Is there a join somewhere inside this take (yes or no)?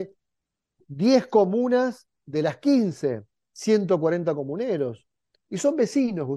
no